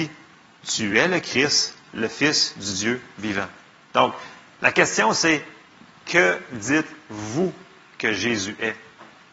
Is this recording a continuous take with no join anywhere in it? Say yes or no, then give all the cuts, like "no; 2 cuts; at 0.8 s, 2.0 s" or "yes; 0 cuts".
yes; 0 cuts